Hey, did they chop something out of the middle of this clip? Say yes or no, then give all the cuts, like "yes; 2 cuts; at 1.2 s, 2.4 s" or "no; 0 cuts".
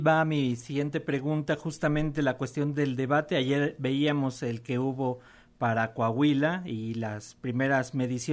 no; 0 cuts